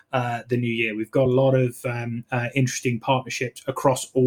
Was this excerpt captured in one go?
yes; 0 cuts

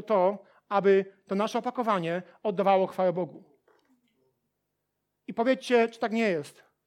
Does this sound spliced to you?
no; 0 cuts

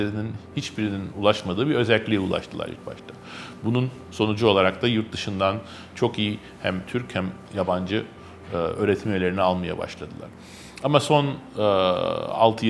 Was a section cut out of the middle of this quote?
no; 0 cuts

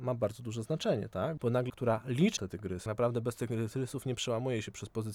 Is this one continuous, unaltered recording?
no; 3 cuts; at 1.7 s, 2.4 s, 2.9 s

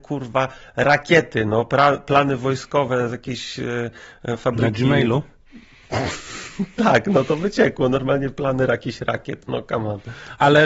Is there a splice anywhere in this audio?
no; 0 cuts

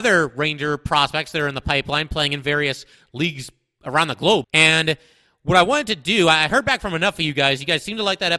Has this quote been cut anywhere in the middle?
yes; 1 cut; at 4.4 s

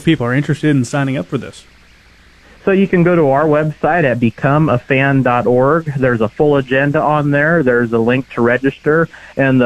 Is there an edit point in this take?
no; 0 cuts

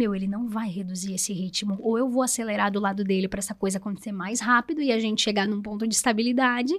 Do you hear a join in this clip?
no; 0 cuts

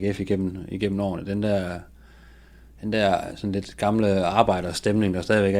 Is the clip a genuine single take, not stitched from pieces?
yes; 0 cuts

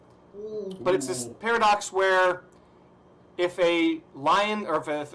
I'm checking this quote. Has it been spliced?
no; 0 cuts

